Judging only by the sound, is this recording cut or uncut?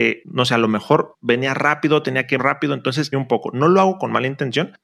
cut